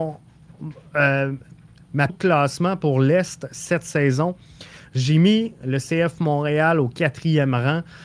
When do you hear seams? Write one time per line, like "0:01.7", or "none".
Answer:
0:02.1